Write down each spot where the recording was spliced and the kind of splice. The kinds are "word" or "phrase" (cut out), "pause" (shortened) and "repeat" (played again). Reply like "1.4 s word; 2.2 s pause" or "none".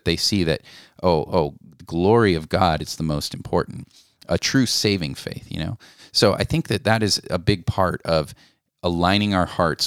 none